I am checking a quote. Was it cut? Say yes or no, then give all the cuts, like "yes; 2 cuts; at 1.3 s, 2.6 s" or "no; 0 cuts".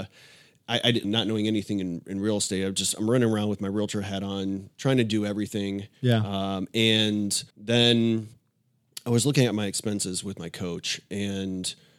yes; 2 cuts; at 1.0 s, 7.5 s